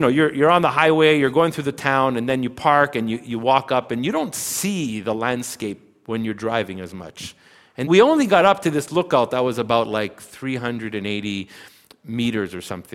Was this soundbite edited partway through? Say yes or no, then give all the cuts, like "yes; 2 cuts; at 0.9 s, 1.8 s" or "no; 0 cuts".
yes; 1 cut; at 7.8 s